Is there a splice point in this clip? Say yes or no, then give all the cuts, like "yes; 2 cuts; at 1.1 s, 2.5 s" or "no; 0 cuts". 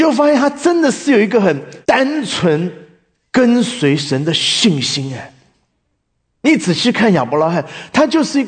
yes; 1 cut; at 1.8 s